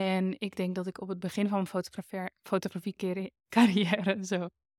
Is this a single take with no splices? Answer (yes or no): no